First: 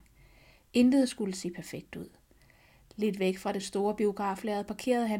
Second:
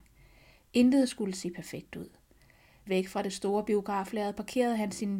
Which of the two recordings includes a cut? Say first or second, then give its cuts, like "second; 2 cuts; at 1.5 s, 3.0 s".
second; 1 cut; at 2.9 s